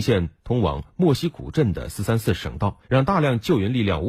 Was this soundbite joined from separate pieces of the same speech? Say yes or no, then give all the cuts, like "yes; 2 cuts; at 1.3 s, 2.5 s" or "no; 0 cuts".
yes; 1 cut; at 2.8 s